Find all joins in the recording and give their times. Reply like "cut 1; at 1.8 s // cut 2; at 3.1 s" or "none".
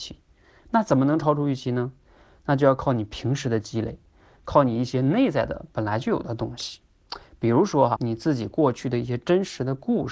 cut 1; at 8.0 s